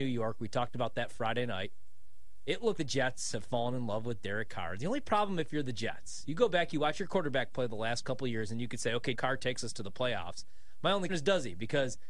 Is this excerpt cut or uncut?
cut